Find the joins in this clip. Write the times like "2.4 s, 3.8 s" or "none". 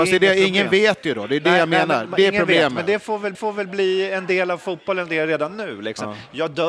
3.3 s, 5.1 s